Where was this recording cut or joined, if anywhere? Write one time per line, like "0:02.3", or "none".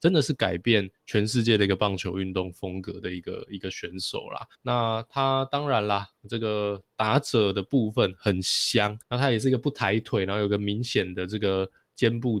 0:00.9
0:04.5
0:09.0